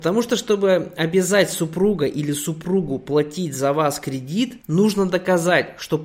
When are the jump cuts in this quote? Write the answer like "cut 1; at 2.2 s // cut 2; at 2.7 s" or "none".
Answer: cut 1; at 4.6 s

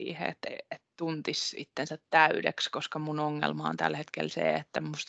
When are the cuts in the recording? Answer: cut 1; at 0.9 s

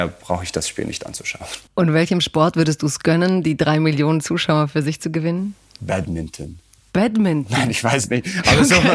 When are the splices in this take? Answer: cut 1; at 1.7 s

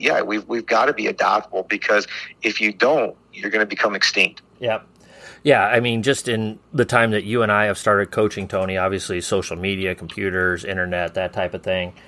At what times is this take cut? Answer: none

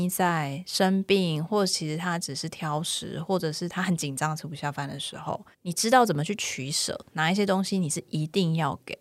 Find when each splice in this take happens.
cut 1; at 5.5 s

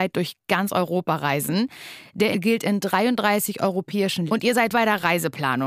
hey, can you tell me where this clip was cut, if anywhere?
cut 1; at 2.3 s // cut 2; at 4.3 s // cut 3; at 4.7 s

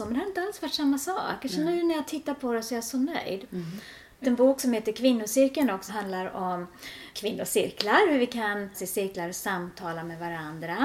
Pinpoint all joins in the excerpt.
cut 1; at 4.2 s // cut 2; at 5.9 s // cut 3; at 7.1 s // cut 4; at 8.7 s

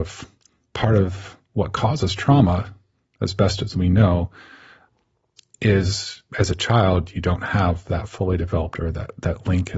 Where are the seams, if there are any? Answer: none

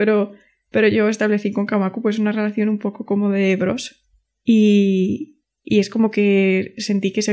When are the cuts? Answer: none

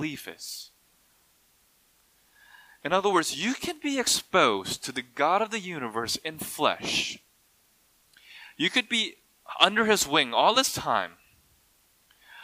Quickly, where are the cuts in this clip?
none

